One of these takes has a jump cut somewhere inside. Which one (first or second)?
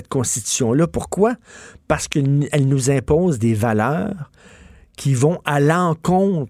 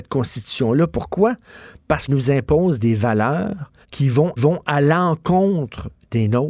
second